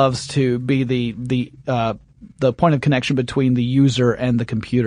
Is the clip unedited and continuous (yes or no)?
yes